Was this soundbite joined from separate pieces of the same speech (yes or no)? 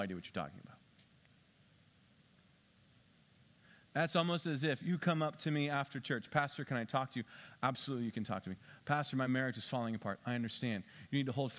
no